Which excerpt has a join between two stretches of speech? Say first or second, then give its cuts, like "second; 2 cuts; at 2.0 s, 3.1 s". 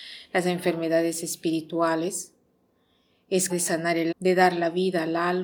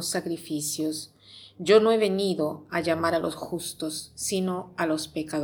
first; 2 cuts; at 3.5 s, 4.1 s